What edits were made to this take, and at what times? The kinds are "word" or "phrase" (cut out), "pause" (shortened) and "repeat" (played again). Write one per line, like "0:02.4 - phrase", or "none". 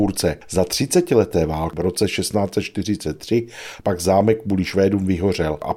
none